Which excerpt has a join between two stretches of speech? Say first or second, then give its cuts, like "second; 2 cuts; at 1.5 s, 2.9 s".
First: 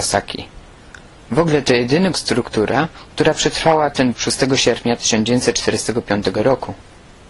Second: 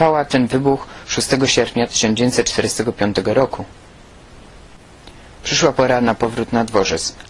first; 2 cuts; at 2.1 s, 4.1 s